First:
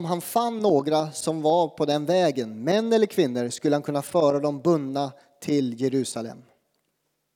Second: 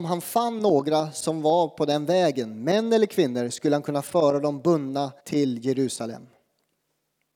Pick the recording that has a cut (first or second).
second